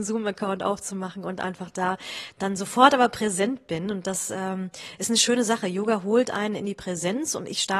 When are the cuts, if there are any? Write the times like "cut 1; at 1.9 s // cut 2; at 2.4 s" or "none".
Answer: none